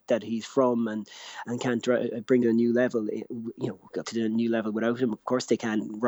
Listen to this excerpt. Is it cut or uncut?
cut